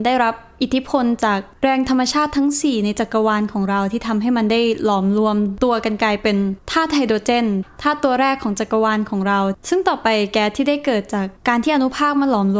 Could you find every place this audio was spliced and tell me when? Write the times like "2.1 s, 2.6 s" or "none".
11.4 s